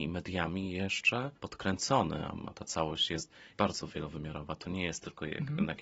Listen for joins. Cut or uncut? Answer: cut